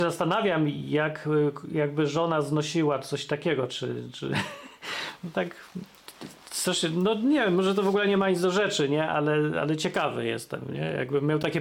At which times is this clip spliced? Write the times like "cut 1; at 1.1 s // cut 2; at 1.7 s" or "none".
none